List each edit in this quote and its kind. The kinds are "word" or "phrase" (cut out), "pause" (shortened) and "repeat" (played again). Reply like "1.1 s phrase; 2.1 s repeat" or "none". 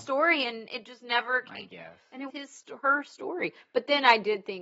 2.3 s word